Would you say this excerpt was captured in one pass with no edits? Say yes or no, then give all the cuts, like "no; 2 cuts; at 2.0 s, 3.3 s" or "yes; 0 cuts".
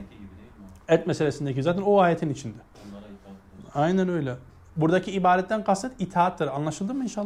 yes; 0 cuts